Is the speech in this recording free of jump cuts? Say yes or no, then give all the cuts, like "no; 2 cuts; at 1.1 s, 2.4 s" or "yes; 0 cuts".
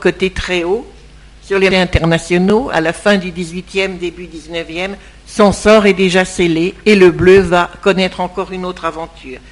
no; 1 cut; at 1.7 s